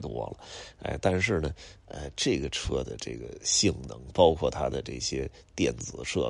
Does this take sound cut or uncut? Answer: uncut